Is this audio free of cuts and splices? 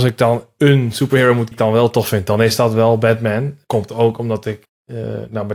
no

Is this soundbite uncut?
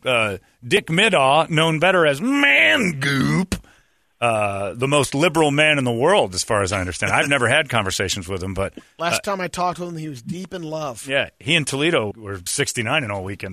no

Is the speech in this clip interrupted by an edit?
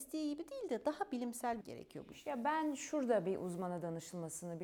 yes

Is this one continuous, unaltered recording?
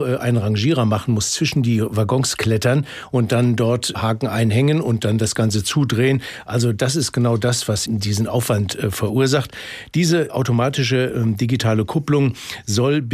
no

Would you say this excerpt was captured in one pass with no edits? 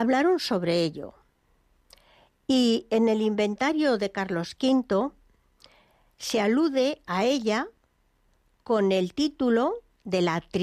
yes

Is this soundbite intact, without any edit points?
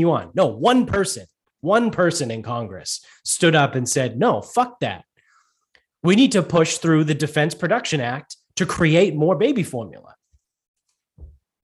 yes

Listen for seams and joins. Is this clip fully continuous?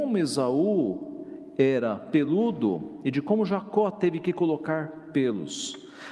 yes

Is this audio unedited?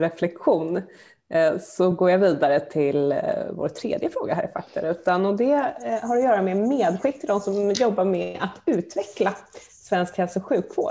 yes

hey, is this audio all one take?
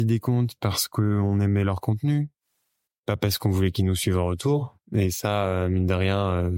yes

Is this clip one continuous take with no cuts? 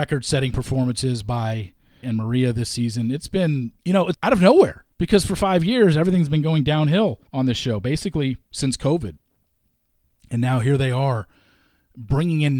no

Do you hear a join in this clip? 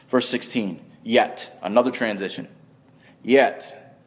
no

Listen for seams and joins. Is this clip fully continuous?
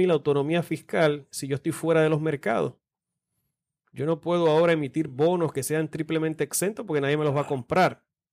yes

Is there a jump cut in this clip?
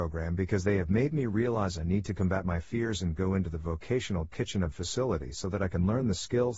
yes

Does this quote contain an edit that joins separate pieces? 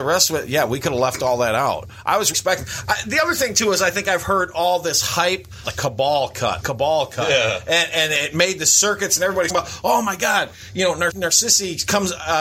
yes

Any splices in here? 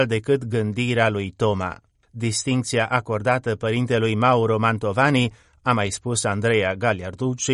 no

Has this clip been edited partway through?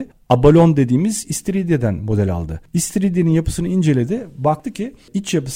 no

